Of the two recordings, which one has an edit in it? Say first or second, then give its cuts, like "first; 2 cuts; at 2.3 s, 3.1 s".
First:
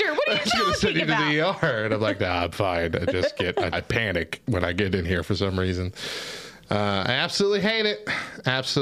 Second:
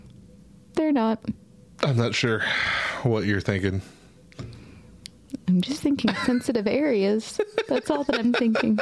first; 1 cut; at 3.7 s